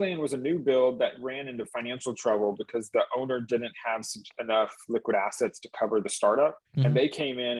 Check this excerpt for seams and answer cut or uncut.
cut